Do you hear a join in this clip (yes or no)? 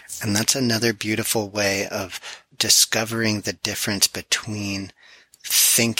yes